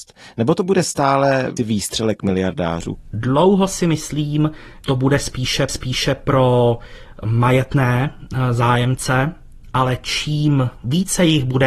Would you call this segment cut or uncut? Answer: cut